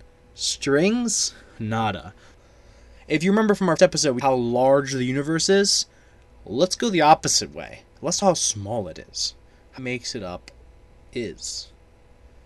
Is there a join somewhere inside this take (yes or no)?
yes